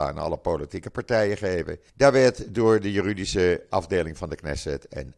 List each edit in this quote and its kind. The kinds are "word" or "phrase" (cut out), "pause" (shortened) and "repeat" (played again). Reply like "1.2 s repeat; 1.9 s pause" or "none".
1.9 s pause